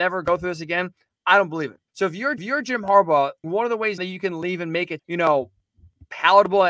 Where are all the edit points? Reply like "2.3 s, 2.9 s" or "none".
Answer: 1.9 s, 2.4 s, 3.4 s, 4.0 s, 5.0 s